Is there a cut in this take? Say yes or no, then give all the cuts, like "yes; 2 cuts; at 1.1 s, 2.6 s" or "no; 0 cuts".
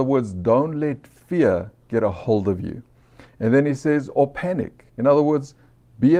yes; 1 cut; at 4.9 s